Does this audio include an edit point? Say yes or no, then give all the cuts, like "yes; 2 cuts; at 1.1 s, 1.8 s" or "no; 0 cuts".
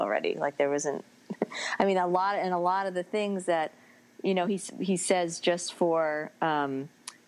no; 0 cuts